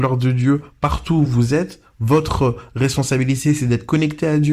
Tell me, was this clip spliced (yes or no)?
no